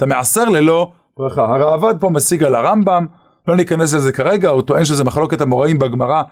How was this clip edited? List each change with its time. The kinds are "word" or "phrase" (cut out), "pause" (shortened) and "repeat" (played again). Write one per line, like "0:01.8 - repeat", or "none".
none